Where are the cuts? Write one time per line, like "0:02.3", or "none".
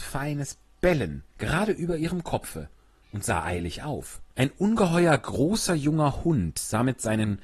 0:01.3
0:04.3